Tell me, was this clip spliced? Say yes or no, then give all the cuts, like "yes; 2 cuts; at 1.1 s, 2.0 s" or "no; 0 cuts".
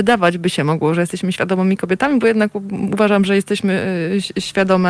no; 0 cuts